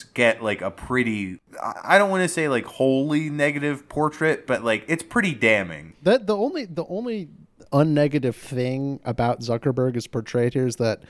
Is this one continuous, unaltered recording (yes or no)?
yes